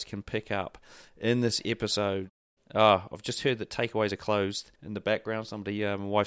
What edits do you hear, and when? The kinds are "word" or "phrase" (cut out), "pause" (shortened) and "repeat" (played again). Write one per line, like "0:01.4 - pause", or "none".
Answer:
0:02.6 - pause
0:04.7 - pause

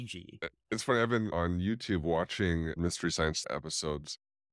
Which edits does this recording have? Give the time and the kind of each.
0:02.8 - word
0:03.4 - word

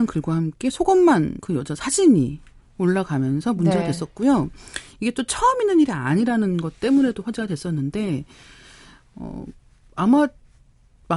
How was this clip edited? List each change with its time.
0:01.4 - word

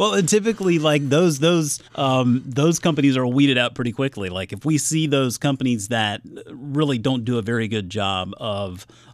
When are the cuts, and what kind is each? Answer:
0:01.8 - pause

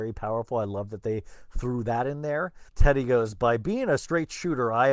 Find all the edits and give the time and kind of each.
0:02.7 - pause

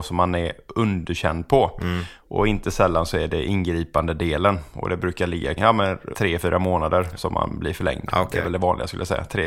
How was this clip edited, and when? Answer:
0:05.6 - word
0:06.1 - word

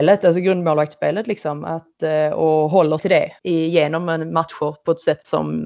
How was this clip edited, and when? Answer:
0:03.0 - word
0:03.4 - pause

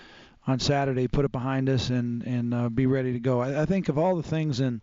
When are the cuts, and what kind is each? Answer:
none

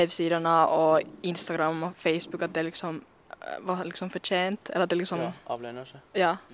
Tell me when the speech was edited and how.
none

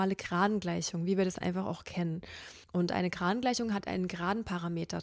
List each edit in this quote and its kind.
0:02.6 - pause

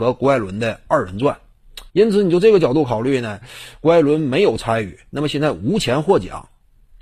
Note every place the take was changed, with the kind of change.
0:01.9 - pause

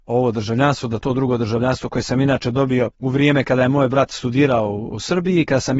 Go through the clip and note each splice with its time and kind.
0:02.9 - pause

